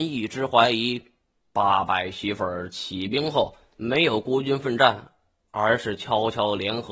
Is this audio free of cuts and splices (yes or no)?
yes